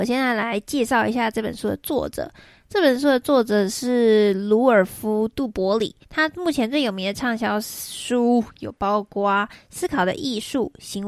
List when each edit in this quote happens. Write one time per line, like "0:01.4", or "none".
0:06.0